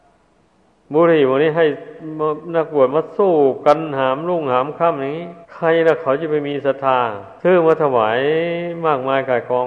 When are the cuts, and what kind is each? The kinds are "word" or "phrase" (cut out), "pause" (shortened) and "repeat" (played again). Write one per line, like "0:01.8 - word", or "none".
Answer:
0:05.4 - pause
0:07.4 - pause